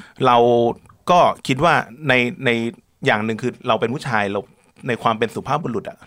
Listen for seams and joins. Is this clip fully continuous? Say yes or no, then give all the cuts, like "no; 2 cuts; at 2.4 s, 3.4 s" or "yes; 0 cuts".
yes; 0 cuts